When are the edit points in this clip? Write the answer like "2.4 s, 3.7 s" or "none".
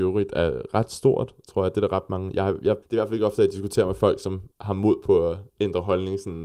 2.8 s, 4.5 s, 5.5 s